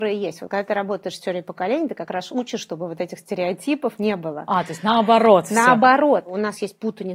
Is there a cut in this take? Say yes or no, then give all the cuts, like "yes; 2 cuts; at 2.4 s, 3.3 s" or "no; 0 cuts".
no; 0 cuts